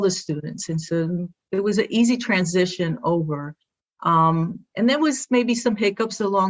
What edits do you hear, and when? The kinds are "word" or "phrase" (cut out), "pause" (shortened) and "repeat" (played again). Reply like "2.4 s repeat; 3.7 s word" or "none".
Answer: none